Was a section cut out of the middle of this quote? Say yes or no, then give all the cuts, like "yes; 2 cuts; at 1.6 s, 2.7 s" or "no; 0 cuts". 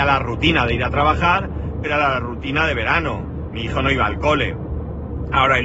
yes; 1 cut; at 1.8 s